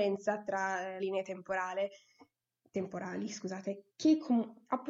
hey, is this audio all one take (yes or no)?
no